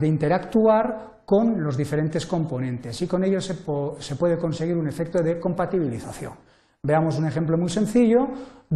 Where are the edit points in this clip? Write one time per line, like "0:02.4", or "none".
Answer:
none